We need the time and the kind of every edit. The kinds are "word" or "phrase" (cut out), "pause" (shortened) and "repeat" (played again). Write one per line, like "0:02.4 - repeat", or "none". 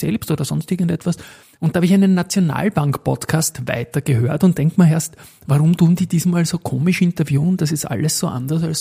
0:01.4 - pause